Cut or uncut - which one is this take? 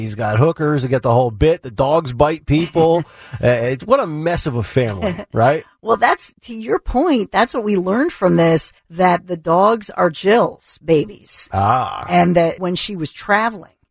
cut